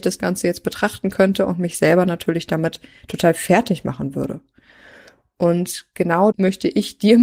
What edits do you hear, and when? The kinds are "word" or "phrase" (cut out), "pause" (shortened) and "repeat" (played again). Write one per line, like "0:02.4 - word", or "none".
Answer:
0:06.3 - word